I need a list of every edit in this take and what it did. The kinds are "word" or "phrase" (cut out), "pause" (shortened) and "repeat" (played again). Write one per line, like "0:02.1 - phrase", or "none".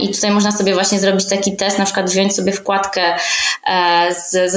none